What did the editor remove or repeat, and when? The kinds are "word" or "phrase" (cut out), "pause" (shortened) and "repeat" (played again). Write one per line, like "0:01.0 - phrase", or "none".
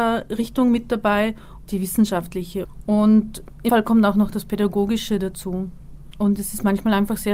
0:01.7 - word
0:03.7 - word